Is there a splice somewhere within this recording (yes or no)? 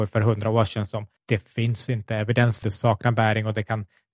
yes